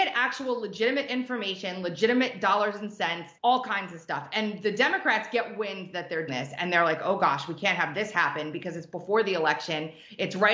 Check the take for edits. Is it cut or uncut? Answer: cut